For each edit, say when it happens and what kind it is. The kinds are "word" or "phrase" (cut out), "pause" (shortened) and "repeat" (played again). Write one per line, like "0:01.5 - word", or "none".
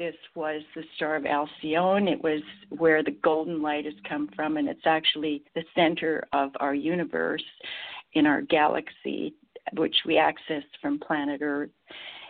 0:05.5 - pause